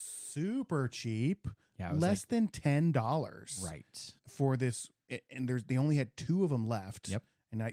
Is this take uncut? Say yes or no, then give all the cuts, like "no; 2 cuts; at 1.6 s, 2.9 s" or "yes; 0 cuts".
no; 1 cut; at 4.2 s